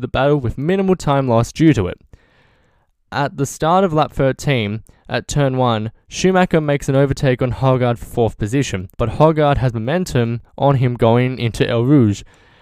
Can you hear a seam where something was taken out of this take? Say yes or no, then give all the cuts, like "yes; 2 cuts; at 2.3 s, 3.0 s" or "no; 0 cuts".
yes; 1 cut; at 8.9 s